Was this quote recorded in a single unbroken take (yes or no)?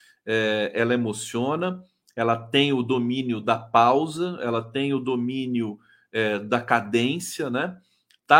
yes